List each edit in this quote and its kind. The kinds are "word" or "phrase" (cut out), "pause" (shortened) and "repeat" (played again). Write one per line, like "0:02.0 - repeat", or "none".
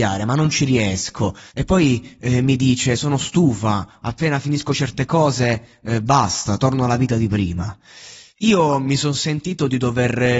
0:01.5 - pause
0:08.3 - pause